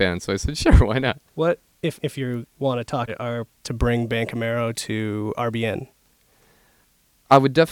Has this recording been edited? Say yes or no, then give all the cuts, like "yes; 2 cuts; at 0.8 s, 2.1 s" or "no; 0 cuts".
yes; 4 cuts; at 1.3 s, 2.0 s, 3.1 s, 3.6 s